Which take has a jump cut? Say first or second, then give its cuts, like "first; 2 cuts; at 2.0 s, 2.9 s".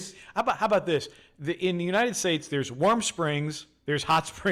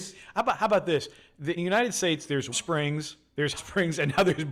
second; 3 cuts; at 1.6 s, 2.5 s, 3.5 s